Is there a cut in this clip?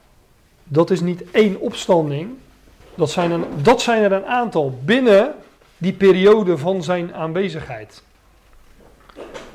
no; 0 cuts

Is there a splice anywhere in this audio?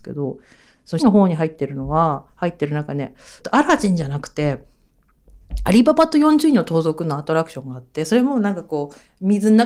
yes; 3 cuts; at 1.0 s, 2.3 s, 3.4 s

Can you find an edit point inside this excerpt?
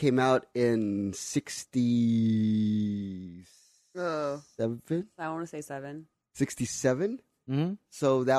no; 0 cuts

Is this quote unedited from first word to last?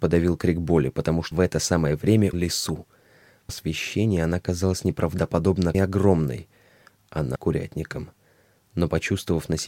no; 5 cuts; at 1.3 s, 2.3 s, 3.5 s, 5.7 s, 7.4 s

